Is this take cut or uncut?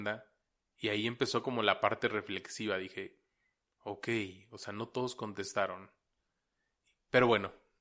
uncut